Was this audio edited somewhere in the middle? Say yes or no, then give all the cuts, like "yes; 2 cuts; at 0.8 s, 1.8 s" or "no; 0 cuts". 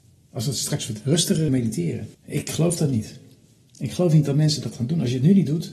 yes; 2 cuts; at 1.5 s, 2.1 s